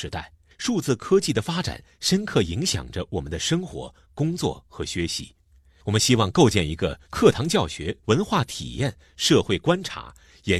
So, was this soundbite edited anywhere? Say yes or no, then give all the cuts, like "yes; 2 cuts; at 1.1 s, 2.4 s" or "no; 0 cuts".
yes; 2 cuts; at 7.0 s, 8.0 s